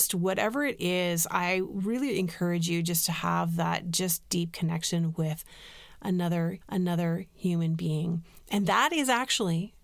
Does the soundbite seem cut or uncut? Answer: cut